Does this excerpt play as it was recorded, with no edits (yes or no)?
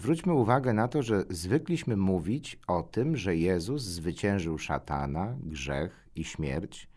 yes